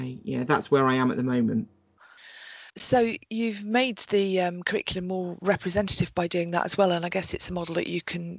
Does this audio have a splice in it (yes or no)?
yes